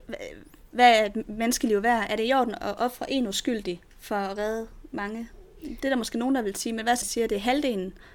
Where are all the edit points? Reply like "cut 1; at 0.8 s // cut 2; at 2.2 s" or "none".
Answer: cut 1; at 3.9 s // cut 2; at 7.0 s

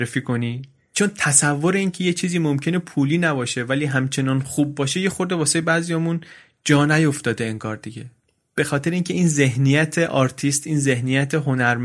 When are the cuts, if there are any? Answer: none

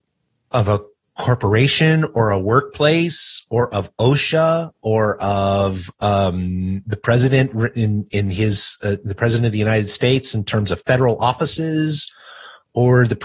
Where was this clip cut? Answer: none

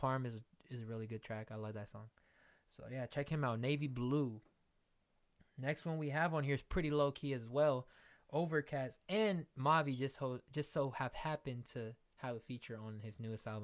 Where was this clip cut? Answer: none

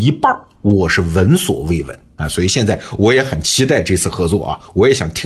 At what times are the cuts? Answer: none

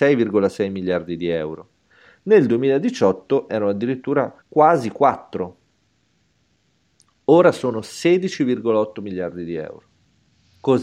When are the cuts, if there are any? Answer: cut 1; at 4.4 s

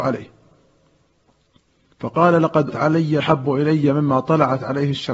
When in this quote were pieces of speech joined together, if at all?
cut 1; at 2.7 s // cut 2; at 3.2 s

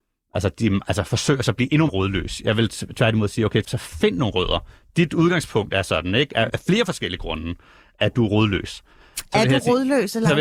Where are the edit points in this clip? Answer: cut 1; at 1.9 s // cut 2; at 3.6 s // cut 3; at 6.5 s

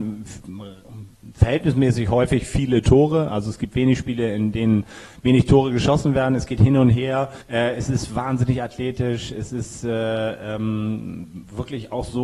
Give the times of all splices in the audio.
cut 1; at 7.4 s

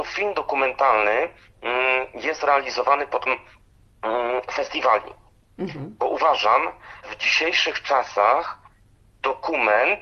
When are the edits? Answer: cut 1; at 3.3 s // cut 2; at 7.0 s

